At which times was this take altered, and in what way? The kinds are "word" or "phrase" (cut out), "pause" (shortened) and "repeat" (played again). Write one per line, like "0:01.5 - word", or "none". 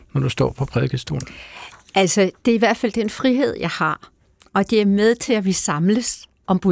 none